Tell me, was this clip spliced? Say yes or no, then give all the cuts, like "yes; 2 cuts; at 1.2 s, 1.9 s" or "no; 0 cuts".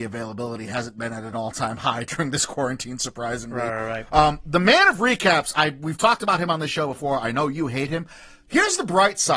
no; 0 cuts